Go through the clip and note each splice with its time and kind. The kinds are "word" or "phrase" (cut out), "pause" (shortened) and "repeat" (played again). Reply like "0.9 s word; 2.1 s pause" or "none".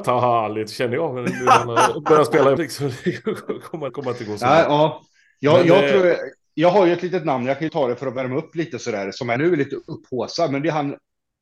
2.6 s word; 3.9 s word; 7.7 s word; 9.4 s word